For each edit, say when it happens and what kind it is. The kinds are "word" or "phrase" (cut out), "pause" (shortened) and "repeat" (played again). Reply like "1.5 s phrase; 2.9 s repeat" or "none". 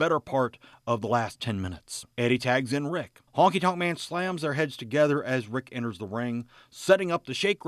2.1 s pause; 3.3 s pause